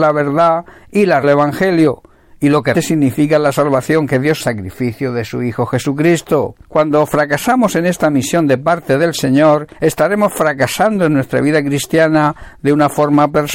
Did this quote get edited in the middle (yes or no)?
yes